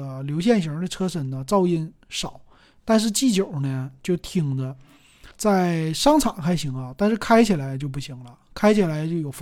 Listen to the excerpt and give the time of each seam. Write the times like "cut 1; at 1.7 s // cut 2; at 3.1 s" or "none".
cut 1; at 5.3 s